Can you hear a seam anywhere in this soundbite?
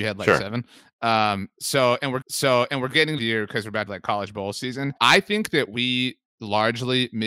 yes; 4 cuts; at 2.2 s, 3.2 s, 3.9 s, 5.0 s

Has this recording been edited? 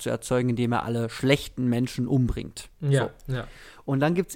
yes; 1 cut; at 2.7 s

